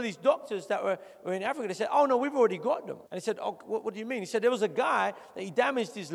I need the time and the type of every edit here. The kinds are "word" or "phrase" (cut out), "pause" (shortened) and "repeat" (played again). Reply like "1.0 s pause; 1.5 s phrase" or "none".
3.1 s pause